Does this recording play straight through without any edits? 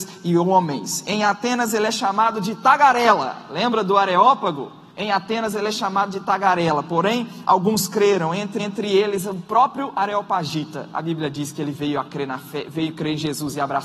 no; 2 cuts; at 4.9 s, 8.6 s

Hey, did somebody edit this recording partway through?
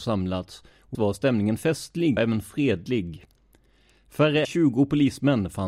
yes; 3 cuts; at 0.9 s, 2.2 s, 4.4 s

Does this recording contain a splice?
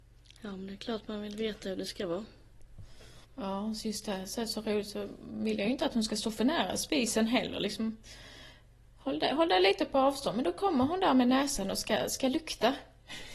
yes; 1 cut; at 3.2 s

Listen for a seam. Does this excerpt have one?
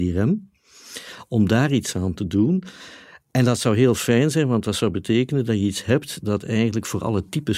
no; 0 cuts

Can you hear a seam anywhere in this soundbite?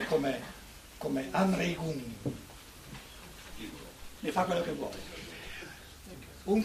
yes; 1 cut; at 4.2 s

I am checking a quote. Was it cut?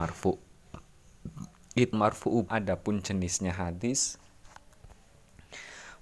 yes; 2 cuts; at 1.9 s, 2.5 s

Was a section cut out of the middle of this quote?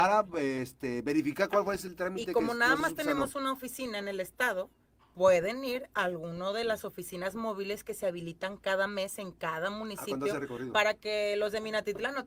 no; 0 cuts

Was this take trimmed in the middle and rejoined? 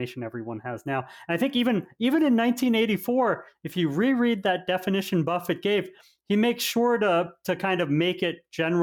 no; 0 cuts

